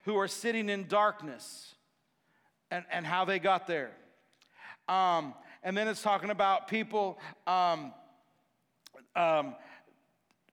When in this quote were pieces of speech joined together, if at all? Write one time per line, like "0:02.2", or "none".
none